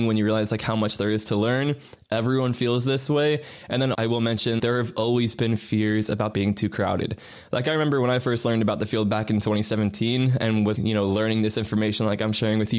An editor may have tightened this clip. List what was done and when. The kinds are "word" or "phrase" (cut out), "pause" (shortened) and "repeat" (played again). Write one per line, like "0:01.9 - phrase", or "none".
0:03.9 - word
0:04.6 - word
0:06.3 - phrase
0:10.8 - word